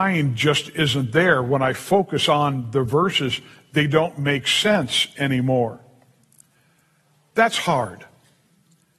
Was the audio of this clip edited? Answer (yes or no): no